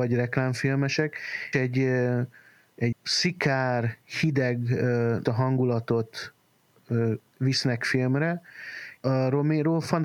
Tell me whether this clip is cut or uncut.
cut